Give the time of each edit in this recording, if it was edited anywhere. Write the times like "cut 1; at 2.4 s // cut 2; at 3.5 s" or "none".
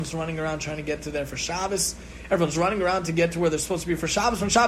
none